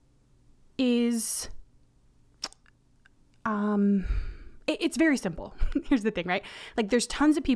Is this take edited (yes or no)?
no